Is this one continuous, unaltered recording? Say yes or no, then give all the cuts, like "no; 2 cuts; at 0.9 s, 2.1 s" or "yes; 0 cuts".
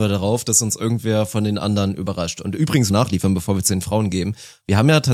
no; 1 cut; at 2.9 s